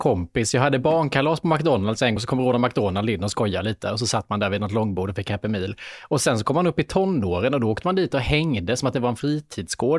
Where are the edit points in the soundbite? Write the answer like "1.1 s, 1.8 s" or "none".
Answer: 2.2 s